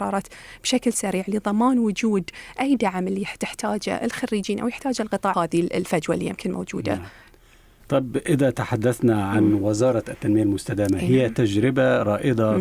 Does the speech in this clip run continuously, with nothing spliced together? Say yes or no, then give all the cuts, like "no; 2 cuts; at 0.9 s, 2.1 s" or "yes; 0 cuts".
no; 1 cut; at 5.3 s